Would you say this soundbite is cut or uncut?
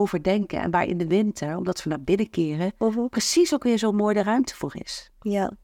uncut